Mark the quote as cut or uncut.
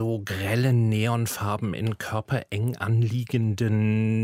uncut